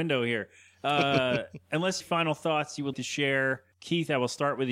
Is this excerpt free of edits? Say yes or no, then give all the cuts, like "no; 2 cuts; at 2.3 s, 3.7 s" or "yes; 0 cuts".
no; 3 cuts; at 2.0 s, 2.9 s, 3.7 s